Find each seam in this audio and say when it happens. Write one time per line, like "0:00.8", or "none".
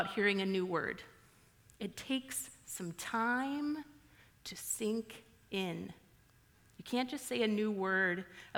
none